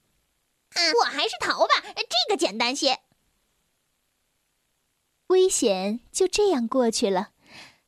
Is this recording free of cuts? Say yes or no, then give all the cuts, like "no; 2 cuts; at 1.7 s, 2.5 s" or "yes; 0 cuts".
no; 1 cut; at 0.9 s